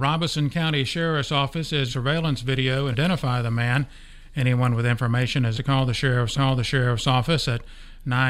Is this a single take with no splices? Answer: no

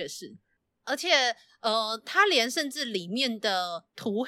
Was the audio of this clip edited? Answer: no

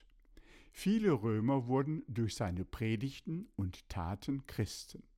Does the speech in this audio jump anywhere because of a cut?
no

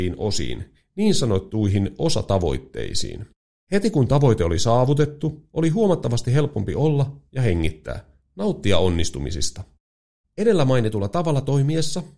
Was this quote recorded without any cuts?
yes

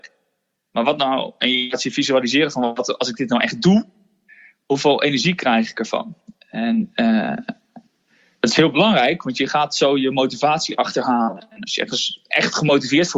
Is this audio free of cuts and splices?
yes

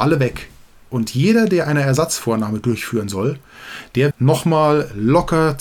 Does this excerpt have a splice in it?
yes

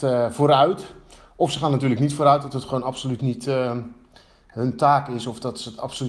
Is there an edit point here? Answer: no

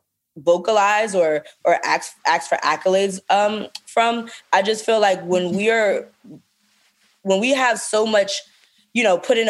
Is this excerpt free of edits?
yes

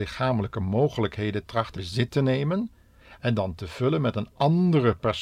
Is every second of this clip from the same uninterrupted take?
no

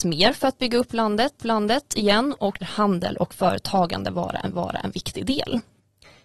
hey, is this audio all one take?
no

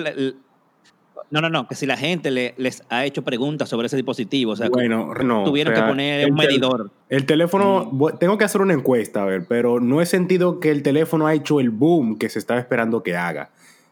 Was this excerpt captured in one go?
no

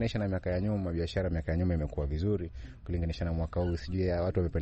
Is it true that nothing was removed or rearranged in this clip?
yes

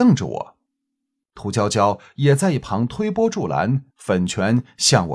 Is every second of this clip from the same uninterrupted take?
no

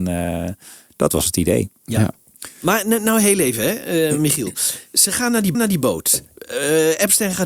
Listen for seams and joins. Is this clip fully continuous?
no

